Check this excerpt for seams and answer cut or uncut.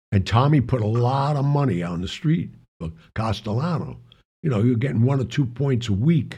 uncut